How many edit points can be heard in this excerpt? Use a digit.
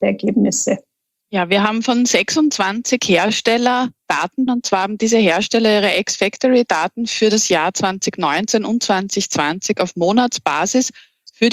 1